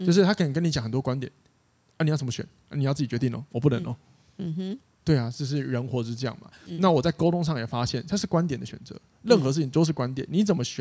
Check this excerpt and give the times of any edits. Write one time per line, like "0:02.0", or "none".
none